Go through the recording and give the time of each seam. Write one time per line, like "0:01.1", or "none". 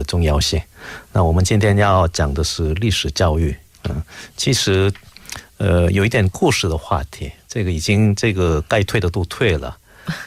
0:03.7